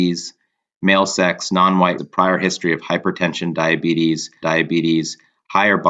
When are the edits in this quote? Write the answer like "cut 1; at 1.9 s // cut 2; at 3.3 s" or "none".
cut 1; at 2.0 s // cut 2; at 4.4 s